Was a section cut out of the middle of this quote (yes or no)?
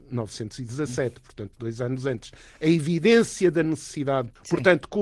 no